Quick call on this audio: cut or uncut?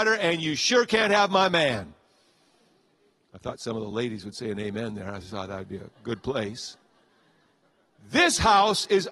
uncut